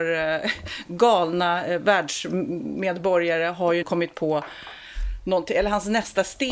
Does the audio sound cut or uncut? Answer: cut